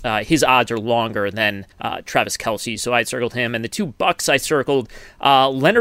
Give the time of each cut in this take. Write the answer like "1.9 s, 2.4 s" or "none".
1.7 s